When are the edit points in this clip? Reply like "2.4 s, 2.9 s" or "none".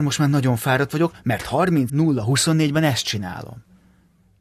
1.9 s